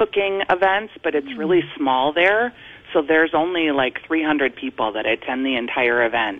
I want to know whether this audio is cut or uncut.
uncut